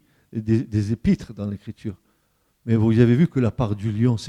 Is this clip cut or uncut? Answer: uncut